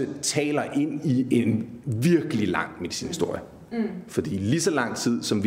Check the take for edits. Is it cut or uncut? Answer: uncut